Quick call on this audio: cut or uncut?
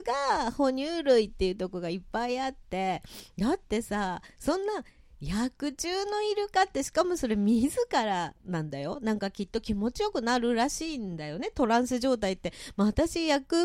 cut